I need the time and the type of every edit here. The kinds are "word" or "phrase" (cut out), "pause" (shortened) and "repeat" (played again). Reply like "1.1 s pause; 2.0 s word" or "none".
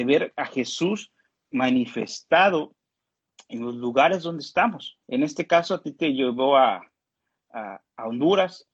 5.0 s pause

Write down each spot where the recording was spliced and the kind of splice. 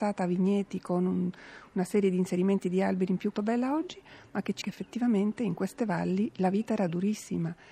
3.3 s phrase; 4.6 s word

